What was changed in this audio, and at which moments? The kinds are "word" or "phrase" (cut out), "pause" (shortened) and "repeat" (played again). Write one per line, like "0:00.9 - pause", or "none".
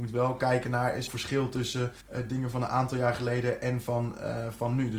0:01.1 - phrase
0:02.0 - pause

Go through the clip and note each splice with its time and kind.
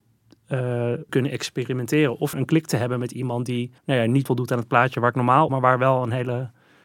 0:01.1 - phrase
0:02.3 - word
0:03.8 - pause
0:04.3 - word
0:05.5 - word

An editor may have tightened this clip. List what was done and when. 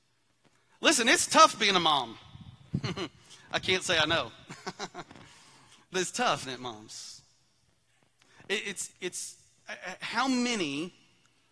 0:05.9 - word
0:06.4 - word
0:08.9 - word

